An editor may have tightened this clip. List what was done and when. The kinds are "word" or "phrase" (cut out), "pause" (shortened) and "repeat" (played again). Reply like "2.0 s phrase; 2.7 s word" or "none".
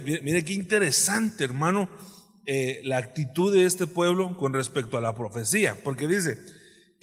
none